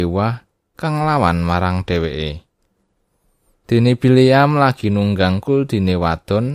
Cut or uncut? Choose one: uncut